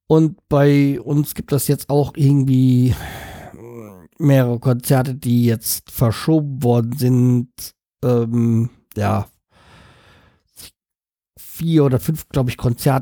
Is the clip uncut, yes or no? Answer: yes